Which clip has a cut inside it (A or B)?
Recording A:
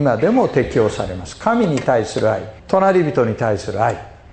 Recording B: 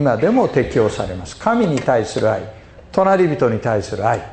A